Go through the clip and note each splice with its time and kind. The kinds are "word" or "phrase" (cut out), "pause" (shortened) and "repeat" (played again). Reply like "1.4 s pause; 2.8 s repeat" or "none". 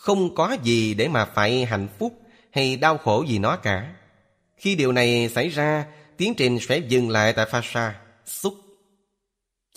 none